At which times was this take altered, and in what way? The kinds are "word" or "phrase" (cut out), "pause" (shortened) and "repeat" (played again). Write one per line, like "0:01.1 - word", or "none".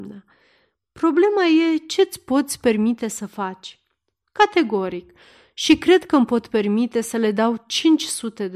none